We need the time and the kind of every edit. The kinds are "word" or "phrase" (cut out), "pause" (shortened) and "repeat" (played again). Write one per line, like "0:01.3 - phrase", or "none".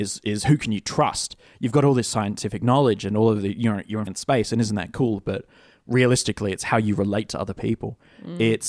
0:04.1 - word